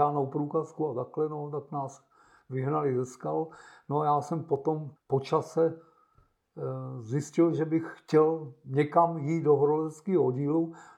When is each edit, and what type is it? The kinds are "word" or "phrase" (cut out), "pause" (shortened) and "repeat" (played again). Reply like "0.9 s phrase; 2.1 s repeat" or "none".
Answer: 5.0 s pause